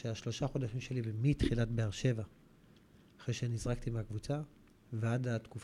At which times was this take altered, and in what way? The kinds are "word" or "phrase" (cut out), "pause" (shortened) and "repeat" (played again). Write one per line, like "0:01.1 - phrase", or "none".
none